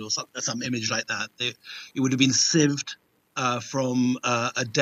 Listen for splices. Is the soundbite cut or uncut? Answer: uncut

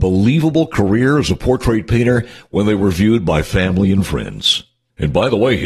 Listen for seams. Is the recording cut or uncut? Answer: uncut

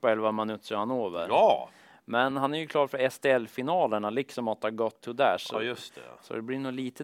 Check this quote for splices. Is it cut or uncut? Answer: uncut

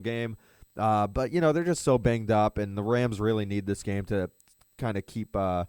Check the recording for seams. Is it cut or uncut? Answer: uncut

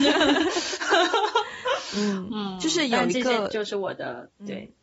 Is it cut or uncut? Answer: uncut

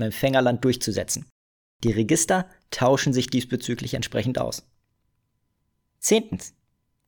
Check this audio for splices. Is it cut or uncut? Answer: uncut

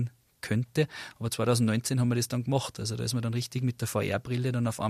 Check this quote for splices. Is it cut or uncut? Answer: uncut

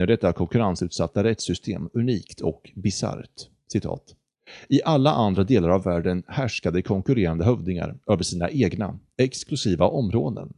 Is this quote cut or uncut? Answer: uncut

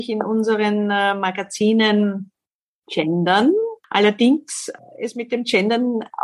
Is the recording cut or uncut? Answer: uncut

